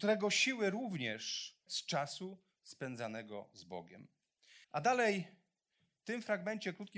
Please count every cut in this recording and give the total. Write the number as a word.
two